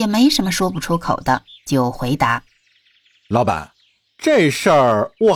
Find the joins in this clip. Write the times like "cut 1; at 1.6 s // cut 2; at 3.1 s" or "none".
none